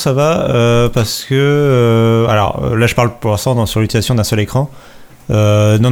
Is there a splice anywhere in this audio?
no; 0 cuts

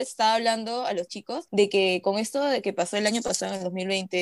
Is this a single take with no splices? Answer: yes; 0 cuts

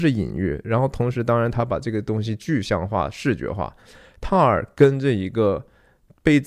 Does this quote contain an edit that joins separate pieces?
no; 0 cuts

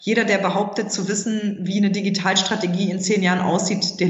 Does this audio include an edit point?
no; 0 cuts

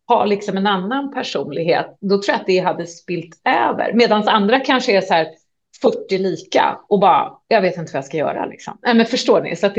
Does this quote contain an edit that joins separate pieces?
no; 0 cuts

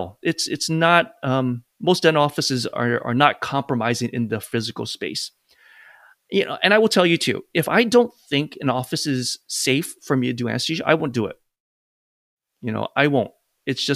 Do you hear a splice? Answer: no; 0 cuts

